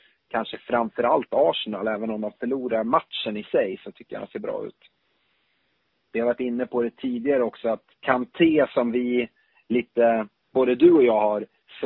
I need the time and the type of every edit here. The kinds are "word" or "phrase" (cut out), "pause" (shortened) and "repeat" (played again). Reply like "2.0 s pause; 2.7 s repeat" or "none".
7.9 s pause